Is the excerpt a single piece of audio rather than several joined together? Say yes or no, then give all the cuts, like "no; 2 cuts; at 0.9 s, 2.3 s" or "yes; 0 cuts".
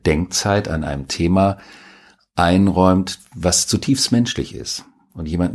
yes; 0 cuts